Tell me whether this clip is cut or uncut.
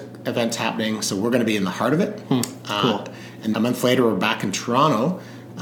cut